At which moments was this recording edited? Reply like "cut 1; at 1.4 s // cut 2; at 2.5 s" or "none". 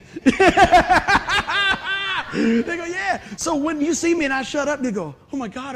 none

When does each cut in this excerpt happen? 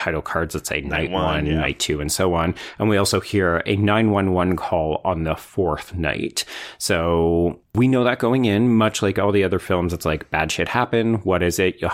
cut 1; at 7.6 s

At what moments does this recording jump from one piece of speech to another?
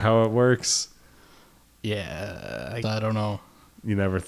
cut 1; at 2.8 s

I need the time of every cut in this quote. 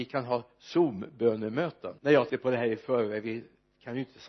cut 1; at 2.0 s // cut 2; at 2.3 s

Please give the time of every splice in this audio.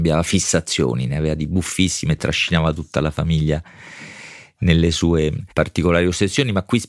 cut 1; at 5.5 s

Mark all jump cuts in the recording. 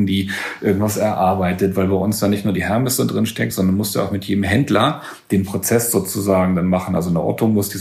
none

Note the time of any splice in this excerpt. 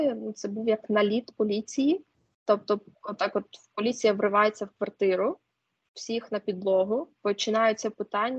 cut 1; at 7.2 s

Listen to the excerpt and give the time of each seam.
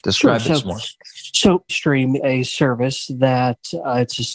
cut 1; at 1.7 s // cut 2; at 2.2 s

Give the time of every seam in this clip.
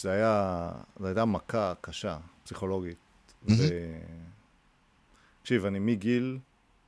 none

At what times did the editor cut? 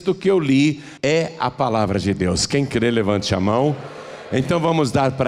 cut 1; at 1.0 s

